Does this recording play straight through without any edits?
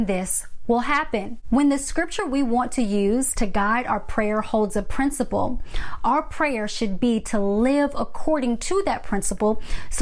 yes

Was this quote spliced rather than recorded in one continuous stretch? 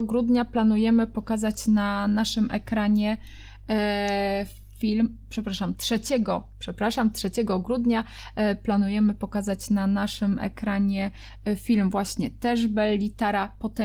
yes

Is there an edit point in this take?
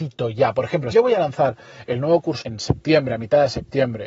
yes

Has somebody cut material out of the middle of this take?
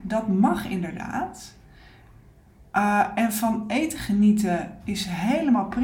no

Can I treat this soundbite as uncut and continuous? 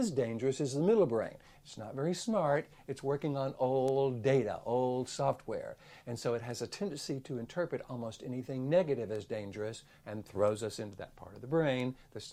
yes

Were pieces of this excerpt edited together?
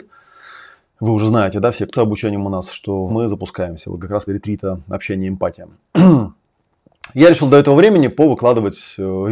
yes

